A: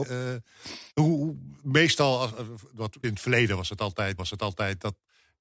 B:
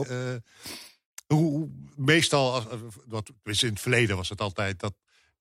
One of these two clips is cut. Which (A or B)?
A